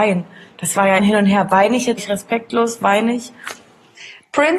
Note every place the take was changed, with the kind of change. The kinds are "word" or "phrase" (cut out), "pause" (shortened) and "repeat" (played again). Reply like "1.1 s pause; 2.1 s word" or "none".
1.0 s word; 2.0 s word